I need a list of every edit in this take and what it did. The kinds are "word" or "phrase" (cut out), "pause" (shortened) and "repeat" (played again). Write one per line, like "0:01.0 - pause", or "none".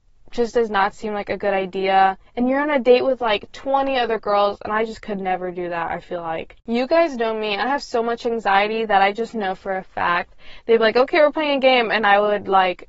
0:02.3 - pause
0:06.6 - pause